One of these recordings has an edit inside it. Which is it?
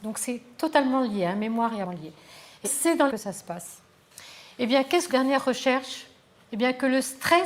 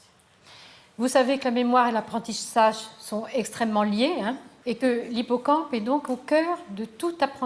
first; 4 cuts; at 1.8 s, 2.6 s, 3.1 s, 5.1 s

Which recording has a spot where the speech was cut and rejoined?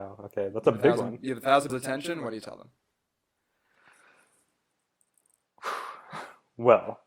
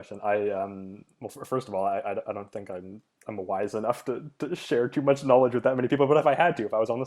first; 1 cut; at 1.7 s

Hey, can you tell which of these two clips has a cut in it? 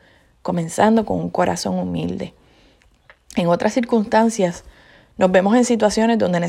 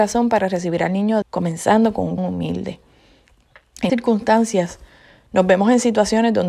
second; 3 cuts; at 1.2 s, 2.2 s, 3.9 s

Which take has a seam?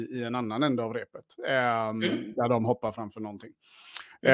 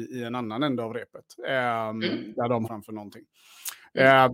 second; 1 cut; at 2.6 s

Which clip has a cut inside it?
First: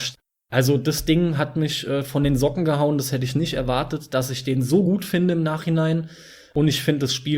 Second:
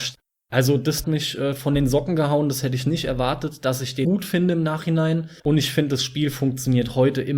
second; 3 cuts; at 1.0 s, 4.0 s, 5.4 s

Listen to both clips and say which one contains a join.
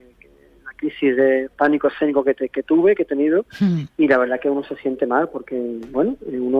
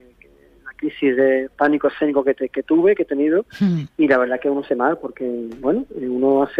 second; 1 cut; at 4.7 s

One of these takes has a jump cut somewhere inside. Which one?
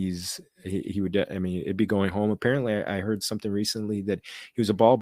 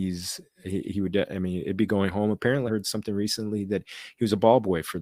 second; 1 cut; at 2.7 s

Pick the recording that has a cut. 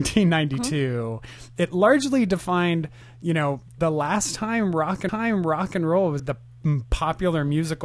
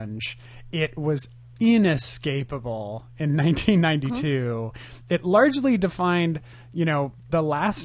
first; 2 cuts; at 5.1 s, 6.2 s

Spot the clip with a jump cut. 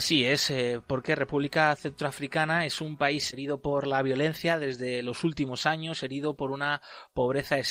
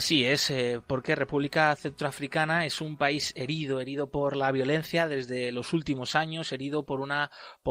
first; 1 cut; at 3.3 s

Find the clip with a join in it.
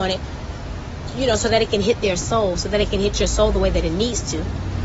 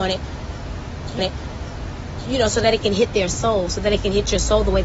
second; 1 cut; at 1.2 s

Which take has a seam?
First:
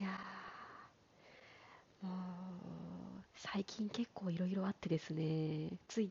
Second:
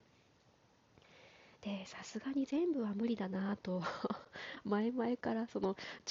first; 1 cut; at 3.3 s

